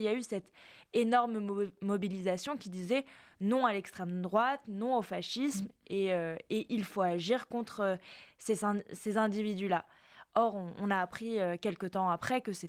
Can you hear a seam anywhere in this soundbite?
no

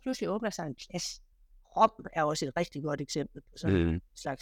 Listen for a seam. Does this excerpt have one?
no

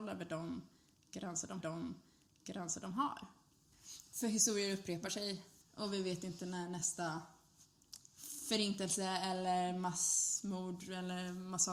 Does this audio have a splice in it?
yes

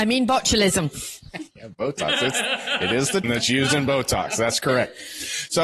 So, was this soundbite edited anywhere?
yes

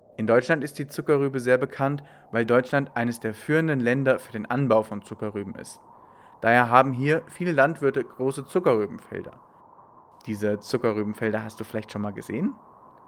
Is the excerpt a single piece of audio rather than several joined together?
yes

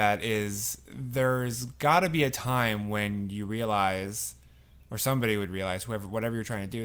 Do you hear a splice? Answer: no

